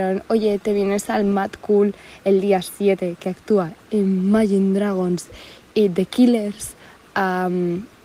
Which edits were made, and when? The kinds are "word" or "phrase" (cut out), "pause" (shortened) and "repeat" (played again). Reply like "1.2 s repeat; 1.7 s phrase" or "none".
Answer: none